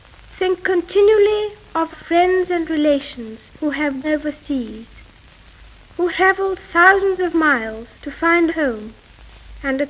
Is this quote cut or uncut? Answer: cut